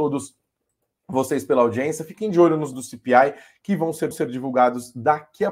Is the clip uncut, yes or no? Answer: no